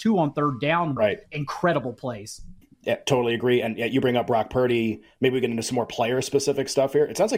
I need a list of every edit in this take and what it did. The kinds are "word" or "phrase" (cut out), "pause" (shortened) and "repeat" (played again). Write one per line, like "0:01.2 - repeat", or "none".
0:01.0 - word
0:02.6 - pause